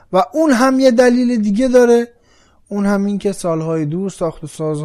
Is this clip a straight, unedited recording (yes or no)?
yes